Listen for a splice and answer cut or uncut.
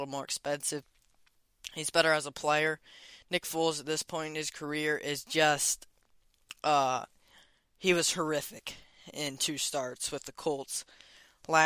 uncut